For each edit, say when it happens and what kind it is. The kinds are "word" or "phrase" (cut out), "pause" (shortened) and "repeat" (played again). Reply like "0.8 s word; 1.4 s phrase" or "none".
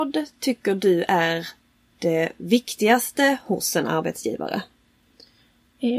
none